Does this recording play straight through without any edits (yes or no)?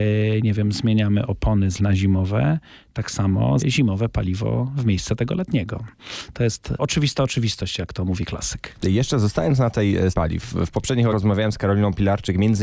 no